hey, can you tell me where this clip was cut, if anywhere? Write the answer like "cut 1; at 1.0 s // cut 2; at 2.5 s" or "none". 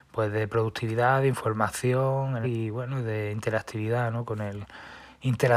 cut 1; at 2.4 s